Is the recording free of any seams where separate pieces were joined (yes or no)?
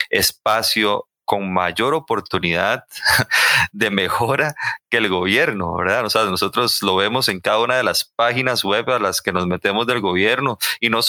yes